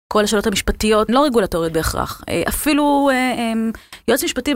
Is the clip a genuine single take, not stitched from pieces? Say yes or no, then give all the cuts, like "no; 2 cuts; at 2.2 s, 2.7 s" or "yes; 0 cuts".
no; 1 cut; at 1.1 s